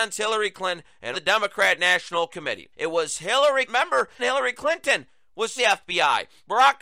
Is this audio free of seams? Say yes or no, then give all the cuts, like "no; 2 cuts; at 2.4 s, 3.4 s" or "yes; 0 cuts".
no; 5 cuts; at 1.1 s, 2.7 s, 3.7 s, 4.2 s, 5.6 s